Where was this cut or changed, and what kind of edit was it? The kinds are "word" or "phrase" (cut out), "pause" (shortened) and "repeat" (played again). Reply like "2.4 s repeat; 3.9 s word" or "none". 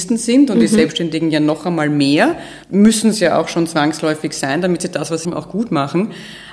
2.6 s pause; 5.2 s phrase